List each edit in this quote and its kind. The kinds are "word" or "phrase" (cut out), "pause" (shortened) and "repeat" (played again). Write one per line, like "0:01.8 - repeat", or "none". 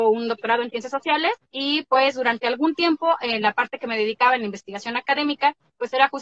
none